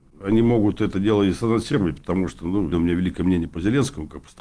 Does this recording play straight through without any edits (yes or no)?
no